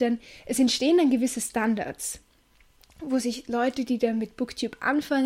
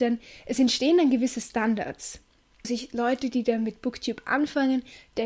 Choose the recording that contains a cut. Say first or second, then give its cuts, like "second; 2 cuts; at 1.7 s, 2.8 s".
second; 1 cut; at 2.6 s